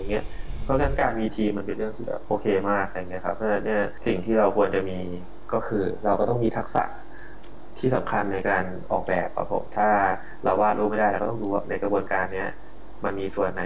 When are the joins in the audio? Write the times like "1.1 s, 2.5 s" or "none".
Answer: 11.6 s